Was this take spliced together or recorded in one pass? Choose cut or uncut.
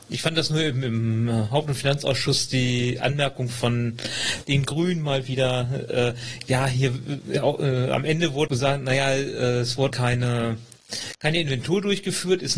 cut